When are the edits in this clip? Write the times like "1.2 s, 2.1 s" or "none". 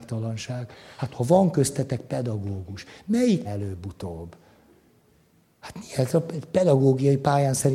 3.4 s